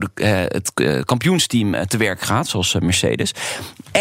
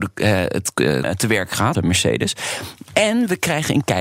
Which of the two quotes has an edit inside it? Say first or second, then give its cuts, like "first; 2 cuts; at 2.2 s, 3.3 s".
second; 2 cuts; at 1.0 s, 1.7 s